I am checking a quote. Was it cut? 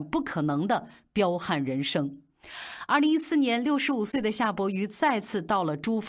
no; 0 cuts

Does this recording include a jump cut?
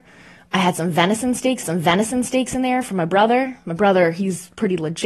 yes; 1 cut; at 1.6 s

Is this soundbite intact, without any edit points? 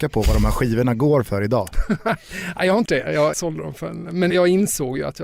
no; 3 cuts; at 2.9 s, 3.3 s, 4.3 s

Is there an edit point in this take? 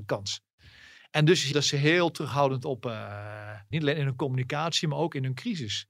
yes; 2 cuts; at 1.5 s, 3.7 s

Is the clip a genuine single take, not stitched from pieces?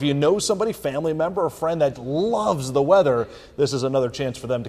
no; 1 cut; at 1.9 s

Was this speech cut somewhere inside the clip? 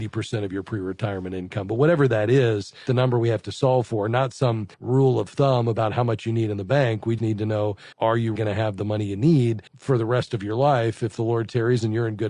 yes; 6 cuts; at 2.9 s, 4.7 s, 7.2 s, 7.9 s, 8.4 s, 9.7 s

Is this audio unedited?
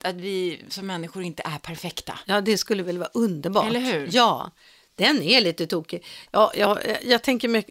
yes; 0 cuts

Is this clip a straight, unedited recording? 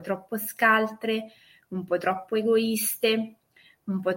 yes; 0 cuts

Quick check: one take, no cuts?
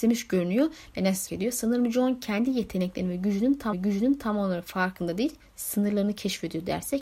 no; 2 cuts; at 1.3 s, 3.7 s

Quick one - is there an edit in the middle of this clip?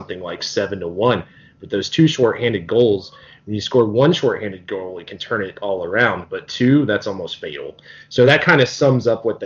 no; 0 cuts

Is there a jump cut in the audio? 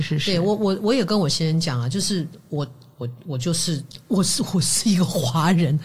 no; 0 cuts

